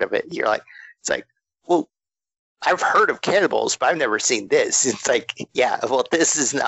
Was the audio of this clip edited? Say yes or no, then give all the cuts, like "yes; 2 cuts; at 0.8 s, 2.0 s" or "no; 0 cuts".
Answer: no; 0 cuts